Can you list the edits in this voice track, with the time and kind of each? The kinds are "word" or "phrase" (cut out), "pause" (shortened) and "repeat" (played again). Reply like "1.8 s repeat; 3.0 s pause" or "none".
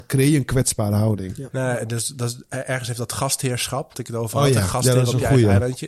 3.9 s word